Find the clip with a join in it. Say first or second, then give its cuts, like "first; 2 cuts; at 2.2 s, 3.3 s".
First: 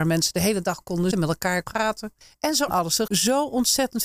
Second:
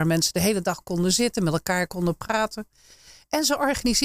first; 5 cuts; at 1.1 s, 1.6 s, 2.2 s, 2.7 s, 3.1 s